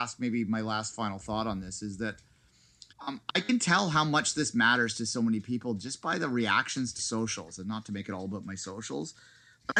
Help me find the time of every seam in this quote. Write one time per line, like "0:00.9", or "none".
0:02.9
0:07.0